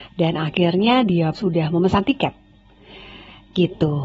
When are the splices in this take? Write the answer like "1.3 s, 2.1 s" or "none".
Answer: 1.3 s